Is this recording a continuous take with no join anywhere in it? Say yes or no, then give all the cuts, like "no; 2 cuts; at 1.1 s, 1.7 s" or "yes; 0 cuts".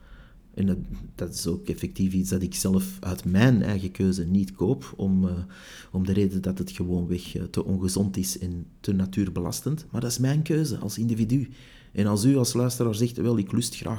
yes; 0 cuts